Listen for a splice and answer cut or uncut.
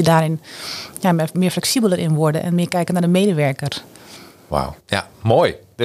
cut